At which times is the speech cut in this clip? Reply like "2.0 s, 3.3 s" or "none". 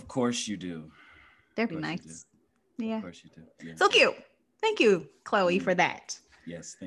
1.7 s, 3.9 s